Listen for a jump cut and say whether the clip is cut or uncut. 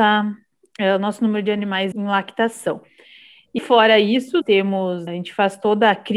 cut